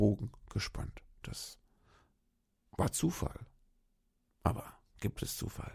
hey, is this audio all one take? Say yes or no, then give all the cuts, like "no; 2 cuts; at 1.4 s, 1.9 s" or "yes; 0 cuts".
yes; 0 cuts